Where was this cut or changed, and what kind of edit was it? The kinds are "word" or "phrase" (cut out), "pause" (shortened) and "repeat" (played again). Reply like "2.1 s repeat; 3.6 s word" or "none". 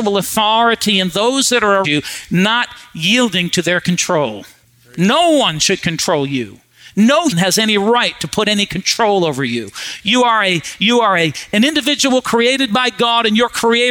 1.8 s word; 7.3 s word